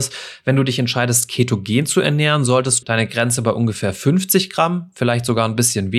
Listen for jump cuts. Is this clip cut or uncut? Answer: cut